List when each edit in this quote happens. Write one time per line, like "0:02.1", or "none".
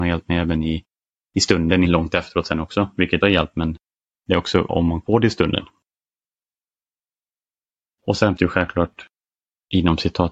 0:01.8
0:03.2
0:04.7
0:05.0
0:08.4